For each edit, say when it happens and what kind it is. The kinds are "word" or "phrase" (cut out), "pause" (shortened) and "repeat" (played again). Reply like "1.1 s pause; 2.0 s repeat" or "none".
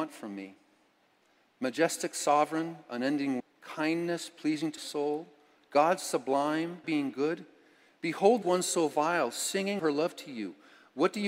3.4 s word; 4.8 s word; 6.8 s word; 8.4 s word; 9.8 s word